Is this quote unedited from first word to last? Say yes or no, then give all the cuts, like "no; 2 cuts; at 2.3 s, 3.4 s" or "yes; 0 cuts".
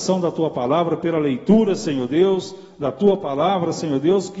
yes; 0 cuts